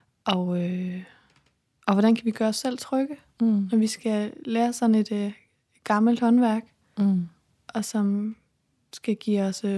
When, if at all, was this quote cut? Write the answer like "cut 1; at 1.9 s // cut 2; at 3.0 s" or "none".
none